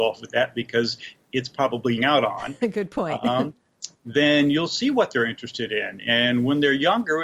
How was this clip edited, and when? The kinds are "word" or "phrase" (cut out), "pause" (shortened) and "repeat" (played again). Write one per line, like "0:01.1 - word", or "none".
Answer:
0:02.0 - phrase